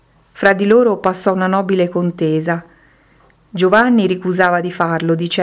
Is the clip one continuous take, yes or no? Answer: yes